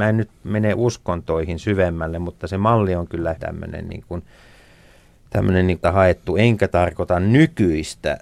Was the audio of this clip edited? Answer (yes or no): yes